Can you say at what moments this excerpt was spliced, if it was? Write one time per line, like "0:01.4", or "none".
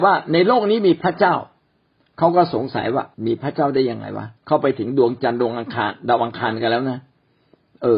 0:03.1
0:04.4